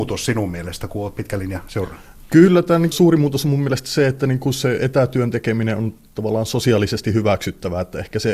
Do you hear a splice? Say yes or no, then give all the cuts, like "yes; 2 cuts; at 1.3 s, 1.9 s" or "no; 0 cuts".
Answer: yes; 1 cut; at 2.9 s